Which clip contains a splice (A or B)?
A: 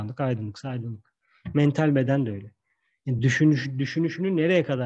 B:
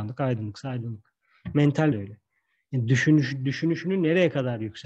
B